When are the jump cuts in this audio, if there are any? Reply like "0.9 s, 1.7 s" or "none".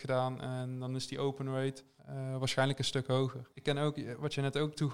2.0 s, 3.5 s